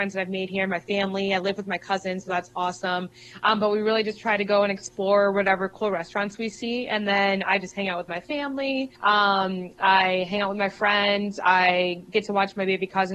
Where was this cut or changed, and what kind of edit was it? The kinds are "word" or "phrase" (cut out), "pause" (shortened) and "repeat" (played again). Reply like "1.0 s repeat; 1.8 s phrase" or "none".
9.0 s pause